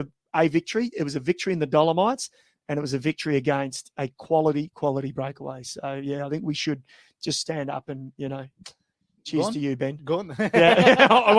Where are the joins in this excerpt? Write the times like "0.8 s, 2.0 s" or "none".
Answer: none